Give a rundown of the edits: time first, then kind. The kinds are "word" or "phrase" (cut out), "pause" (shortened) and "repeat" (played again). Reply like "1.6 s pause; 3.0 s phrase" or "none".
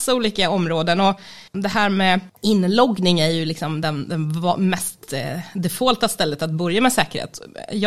1.5 s pause; 2.3 s pause